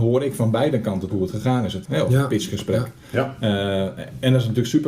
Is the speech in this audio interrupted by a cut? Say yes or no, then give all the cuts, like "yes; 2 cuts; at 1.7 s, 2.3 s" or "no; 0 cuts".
yes; 2 cuts; at 1.1 s, 1.8 s